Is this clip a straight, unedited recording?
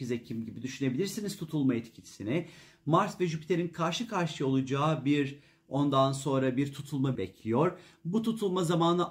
no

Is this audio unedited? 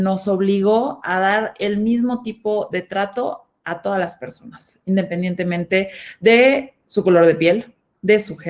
no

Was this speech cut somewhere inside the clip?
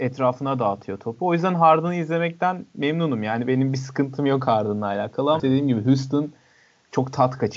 yes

